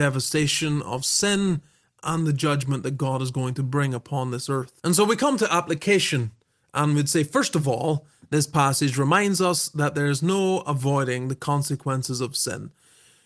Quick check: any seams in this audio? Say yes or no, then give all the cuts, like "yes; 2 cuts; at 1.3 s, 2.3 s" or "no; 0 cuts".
no; 0 cuts